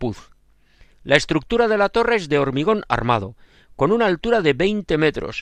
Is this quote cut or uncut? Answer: uncut